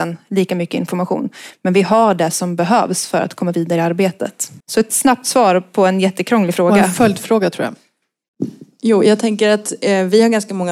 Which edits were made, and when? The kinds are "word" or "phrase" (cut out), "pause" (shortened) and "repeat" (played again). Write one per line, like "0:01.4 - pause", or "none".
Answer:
0:04.6 - pause

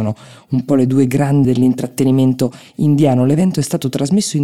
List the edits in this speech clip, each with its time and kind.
0:01.4 - word

